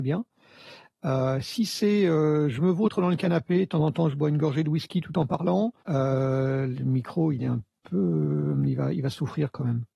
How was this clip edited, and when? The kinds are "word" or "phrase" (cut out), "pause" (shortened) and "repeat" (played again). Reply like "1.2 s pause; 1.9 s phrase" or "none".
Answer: 5.8 s pause